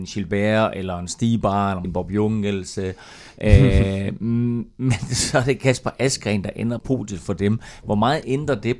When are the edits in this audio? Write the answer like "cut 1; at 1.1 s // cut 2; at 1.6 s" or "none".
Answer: cut 1; at 1.8 s // cut 2; at 6.8 s